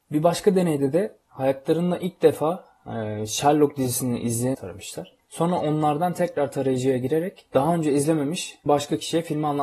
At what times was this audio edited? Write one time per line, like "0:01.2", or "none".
0:04.5
0:08.7